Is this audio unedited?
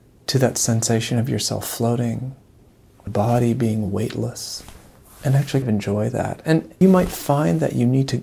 no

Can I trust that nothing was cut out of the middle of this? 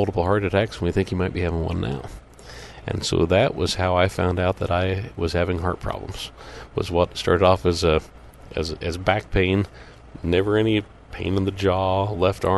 yes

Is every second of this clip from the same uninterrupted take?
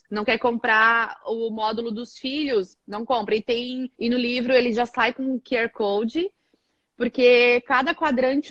no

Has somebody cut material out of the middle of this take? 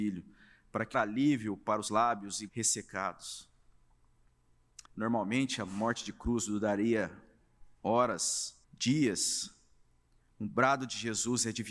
yes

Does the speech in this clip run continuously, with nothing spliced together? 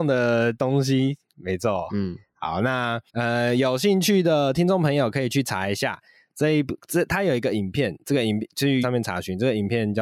no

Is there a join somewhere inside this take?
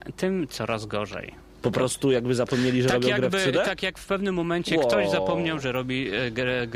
no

